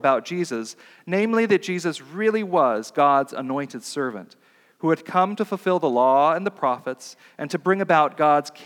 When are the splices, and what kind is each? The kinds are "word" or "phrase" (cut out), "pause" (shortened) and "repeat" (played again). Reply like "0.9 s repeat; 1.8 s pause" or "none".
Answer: none